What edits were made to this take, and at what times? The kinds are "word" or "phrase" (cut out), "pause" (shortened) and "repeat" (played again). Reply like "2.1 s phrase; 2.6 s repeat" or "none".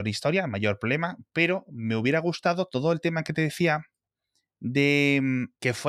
none